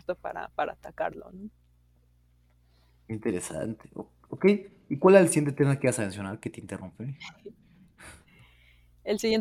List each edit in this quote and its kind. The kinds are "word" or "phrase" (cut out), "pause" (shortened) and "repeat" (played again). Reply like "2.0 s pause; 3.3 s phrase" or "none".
none